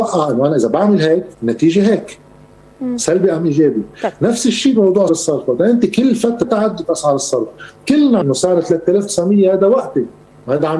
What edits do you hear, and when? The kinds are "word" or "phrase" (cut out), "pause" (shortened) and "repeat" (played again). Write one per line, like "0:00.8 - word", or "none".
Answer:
0:01.3 - pause
0:05.1 - word
0:06.4 - word
0:08.2 - word

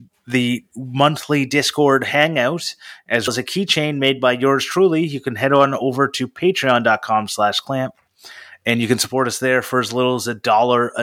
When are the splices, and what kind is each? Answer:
0:03.3 - word

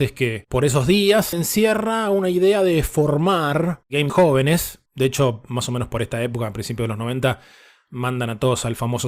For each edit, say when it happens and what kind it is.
0:01.3 - word
0:04.1 - word
0:04.9 - pause

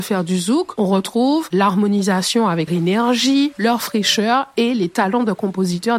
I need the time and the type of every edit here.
0:02.7 - phrase

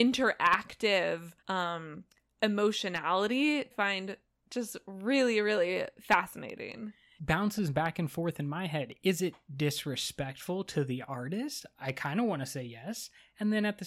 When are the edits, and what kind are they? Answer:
0:01.4 - pause
0:03.7 - phrase
0:07.2 - phrase

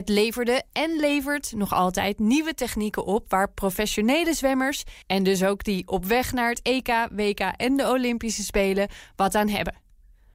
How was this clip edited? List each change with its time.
0:05.0 - pause

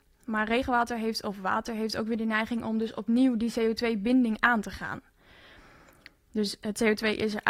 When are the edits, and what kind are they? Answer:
none

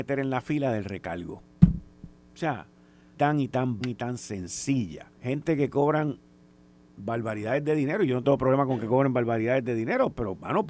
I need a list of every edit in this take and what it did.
0:03.1 - phrase
0:03.8 - phrase
0:05.1 - pause

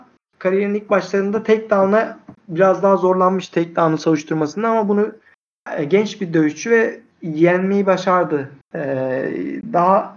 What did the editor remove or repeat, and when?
0:02.4 - pause
0:08.6 - pause

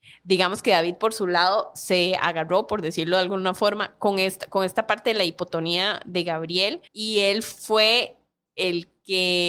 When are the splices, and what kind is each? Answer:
0:06.9 - pause

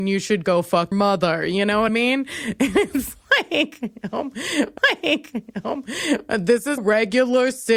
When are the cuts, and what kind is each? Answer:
0:00.9 - word
0:01.9 - word
0:04.8 - repeat
0:06.8 - word

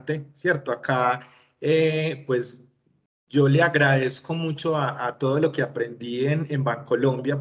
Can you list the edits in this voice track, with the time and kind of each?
none

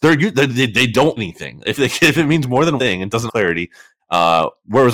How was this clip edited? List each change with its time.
0:01.2 - word
0:02.8 - word
0:03.3 - word
0:04.0 - word

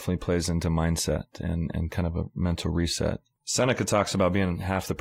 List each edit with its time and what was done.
none

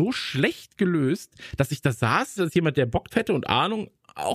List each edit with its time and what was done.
0:02.4 - word
0:03.1 - word

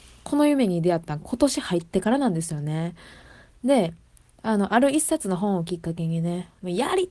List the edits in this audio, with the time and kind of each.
none

